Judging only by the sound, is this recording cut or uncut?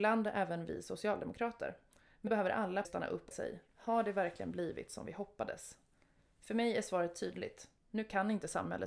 cut